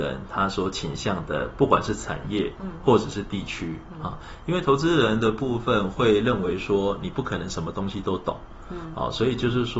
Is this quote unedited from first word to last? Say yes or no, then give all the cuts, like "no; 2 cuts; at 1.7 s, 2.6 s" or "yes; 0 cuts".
yes; 0 cuts